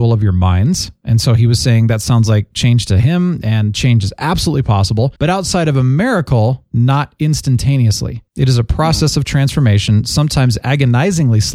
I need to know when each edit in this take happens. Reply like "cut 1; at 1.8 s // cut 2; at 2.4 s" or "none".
cut 1; at 5.2 s // cut 2; at 8.3 s